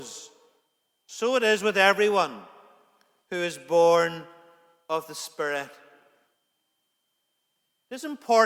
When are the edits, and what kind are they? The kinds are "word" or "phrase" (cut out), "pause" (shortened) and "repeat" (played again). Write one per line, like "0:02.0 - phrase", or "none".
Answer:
none